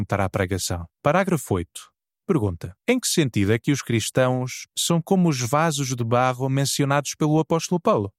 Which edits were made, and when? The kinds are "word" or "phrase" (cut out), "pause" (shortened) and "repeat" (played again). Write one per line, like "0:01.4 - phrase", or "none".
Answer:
0:00.9 - pause
0:02.8 - pause

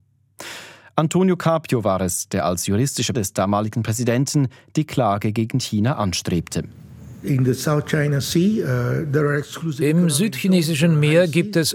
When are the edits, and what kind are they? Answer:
0:03.1 - word

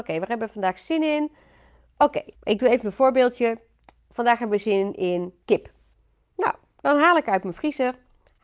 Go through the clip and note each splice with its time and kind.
0:02.3 - word
0:05.4 - pause

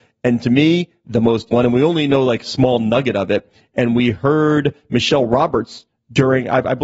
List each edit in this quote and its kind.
0:01.5 - word

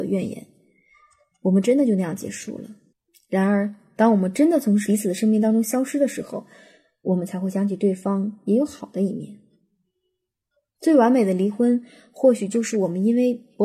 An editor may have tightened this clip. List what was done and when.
0:02.9 - pause

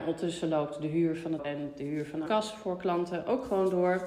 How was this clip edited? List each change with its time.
0:01.4 - word
0:02.3 - word

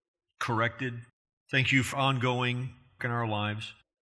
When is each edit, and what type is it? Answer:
0:01.2 - pause
0:01.9 - word
0:03.0 - phrase

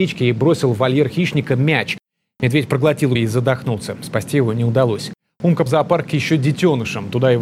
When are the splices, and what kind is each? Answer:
0:03.1 - word
0:05.7 - word

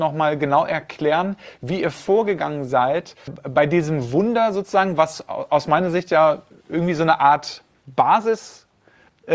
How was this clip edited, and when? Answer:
0:03.3 - word

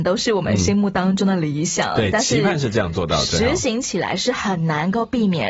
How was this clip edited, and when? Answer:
none

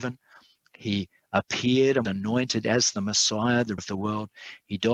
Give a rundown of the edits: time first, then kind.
0:02.0 - word
0:03.8 - word

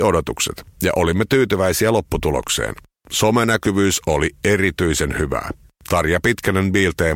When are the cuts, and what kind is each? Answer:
none

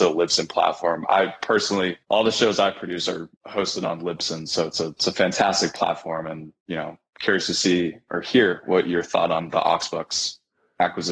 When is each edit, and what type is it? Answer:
0:02.0 - pause
0:03.4 - pause

